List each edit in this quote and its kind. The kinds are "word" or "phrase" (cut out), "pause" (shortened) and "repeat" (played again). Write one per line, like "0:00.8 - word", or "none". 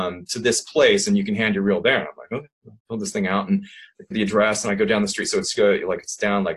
0:04.1 - word